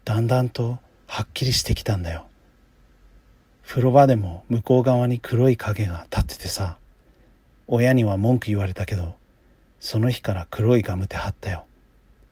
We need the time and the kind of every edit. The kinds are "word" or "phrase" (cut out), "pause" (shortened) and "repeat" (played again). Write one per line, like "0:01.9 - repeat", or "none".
none